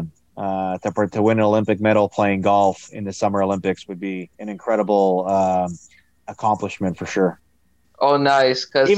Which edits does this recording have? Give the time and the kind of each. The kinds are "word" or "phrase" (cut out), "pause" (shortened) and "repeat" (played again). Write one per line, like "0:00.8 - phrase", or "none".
0:04.3 - pause